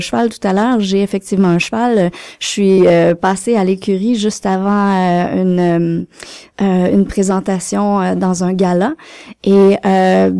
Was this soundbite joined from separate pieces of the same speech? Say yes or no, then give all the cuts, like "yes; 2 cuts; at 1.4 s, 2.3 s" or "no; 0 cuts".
no; 0 cuts